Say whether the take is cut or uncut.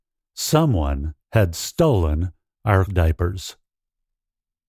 cut